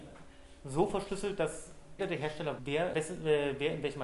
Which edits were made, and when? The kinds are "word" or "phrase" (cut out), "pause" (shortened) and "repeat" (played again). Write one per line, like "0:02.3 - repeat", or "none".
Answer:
0:02.0 - word
0:02.6 - word
0:02.9 - word